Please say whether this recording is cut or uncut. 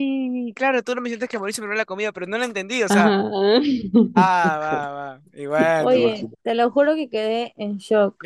cut